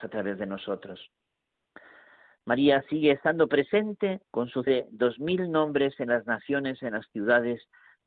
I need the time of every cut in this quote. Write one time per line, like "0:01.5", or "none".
0:04.2
0:04.7